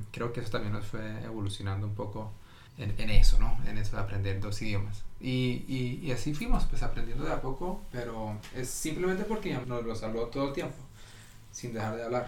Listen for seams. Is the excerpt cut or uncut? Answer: cut